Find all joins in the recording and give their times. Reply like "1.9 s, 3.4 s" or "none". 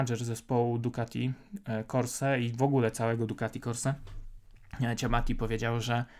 none